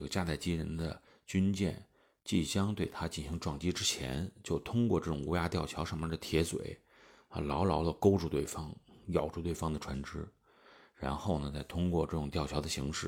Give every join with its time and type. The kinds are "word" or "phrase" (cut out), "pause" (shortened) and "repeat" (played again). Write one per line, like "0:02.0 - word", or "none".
none